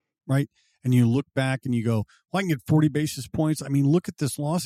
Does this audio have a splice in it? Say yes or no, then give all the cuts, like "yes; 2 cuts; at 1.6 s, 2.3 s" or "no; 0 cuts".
no; 0 cuts